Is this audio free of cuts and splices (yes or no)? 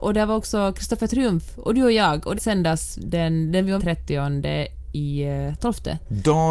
no